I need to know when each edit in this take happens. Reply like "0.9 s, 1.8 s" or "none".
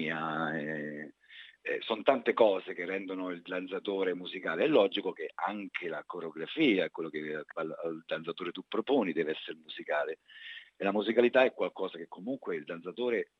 7.5 s